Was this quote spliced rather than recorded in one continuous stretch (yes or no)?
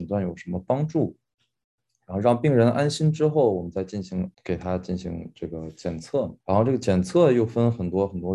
yes